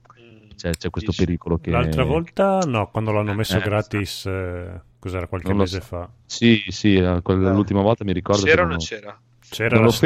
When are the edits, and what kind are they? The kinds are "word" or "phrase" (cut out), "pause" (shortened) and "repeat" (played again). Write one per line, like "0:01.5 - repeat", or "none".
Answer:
none

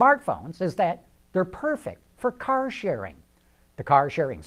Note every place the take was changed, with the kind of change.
none

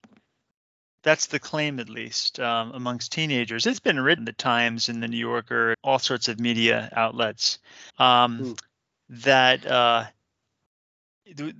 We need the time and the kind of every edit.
0:04.2 - word
0:05.7 - word
0:07.9 - pause

